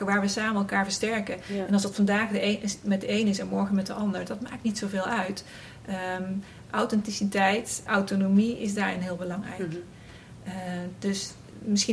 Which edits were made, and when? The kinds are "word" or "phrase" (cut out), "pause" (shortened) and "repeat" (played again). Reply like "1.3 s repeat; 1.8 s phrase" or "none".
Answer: 7.9 s word